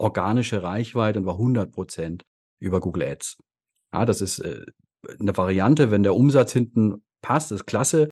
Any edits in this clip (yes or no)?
no